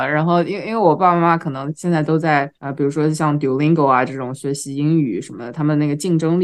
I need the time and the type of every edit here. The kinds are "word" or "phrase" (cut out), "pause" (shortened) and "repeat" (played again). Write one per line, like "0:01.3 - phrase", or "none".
0:02.5 - pause